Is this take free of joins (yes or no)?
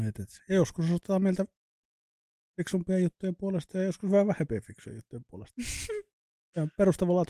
yes